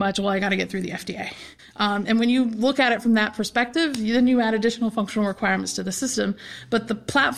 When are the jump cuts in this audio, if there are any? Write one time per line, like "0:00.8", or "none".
0:01.6